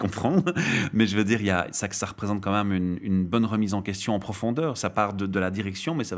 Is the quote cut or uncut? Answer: uncut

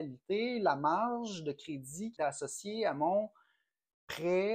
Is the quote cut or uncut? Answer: cut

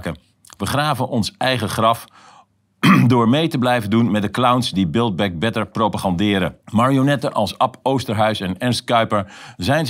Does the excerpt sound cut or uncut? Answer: cut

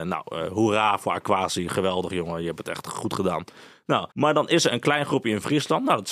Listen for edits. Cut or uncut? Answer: cut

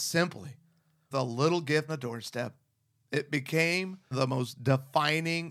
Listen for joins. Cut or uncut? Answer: cut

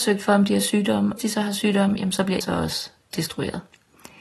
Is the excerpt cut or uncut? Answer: cut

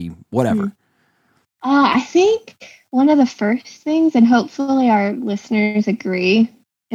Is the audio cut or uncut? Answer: uncut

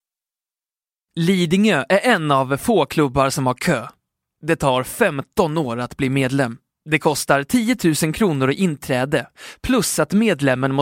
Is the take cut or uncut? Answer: uncut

